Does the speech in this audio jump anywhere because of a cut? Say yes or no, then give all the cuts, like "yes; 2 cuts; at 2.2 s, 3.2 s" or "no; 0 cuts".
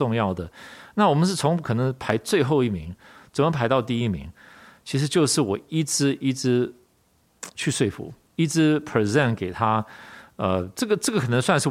no; 0 cuts